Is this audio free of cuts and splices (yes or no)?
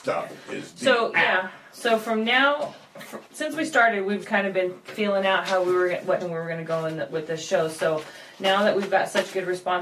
no